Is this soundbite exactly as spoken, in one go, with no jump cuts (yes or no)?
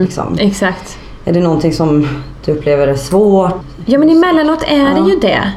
yes